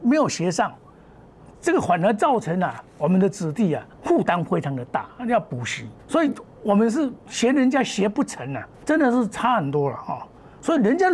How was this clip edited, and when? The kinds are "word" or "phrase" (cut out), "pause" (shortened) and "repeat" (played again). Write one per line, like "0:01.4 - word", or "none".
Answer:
0:02.9 - pause
0:03.9 - pause
0:06.0 - pause
0:07.2 - pause
0:08.7 - pause